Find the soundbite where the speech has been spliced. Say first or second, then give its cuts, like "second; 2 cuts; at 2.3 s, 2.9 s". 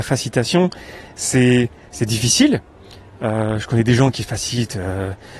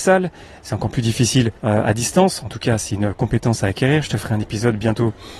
second; 1 cut; at 1.6 s